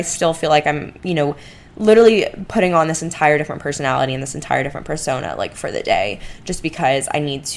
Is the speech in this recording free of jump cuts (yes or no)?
yes